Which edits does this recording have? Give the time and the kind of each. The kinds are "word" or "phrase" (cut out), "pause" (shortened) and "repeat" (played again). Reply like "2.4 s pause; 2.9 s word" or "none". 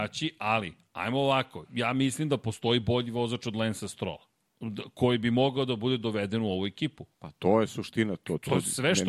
1.6 s word; 4.3 s pause; 7.1 s pause